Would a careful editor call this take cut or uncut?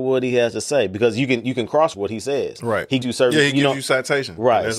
cut